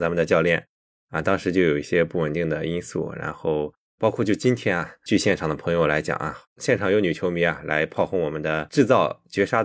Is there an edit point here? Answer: yes; 1 cut; at 6.5 s

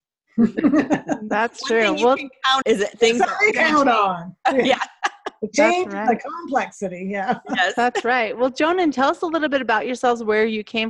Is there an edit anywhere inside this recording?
yes; 3 cuts; at 2.6 s, 3.5 s, 8.9 s

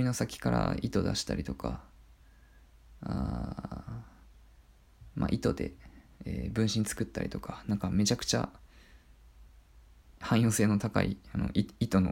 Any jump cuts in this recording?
no; 0 cuts

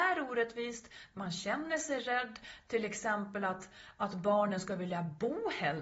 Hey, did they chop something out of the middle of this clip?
no; 0 cuts

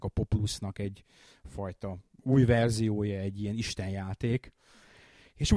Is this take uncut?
yes; 0 cuts

